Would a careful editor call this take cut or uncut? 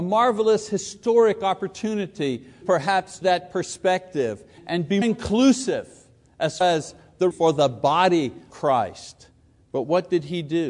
cut